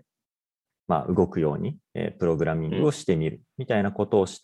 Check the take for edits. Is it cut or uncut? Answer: cut